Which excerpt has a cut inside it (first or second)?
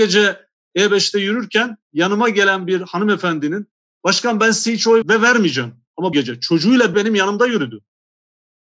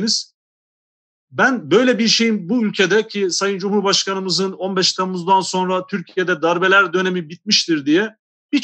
first